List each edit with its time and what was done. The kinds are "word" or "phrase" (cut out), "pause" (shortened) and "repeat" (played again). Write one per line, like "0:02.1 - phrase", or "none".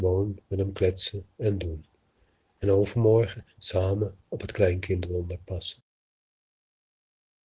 none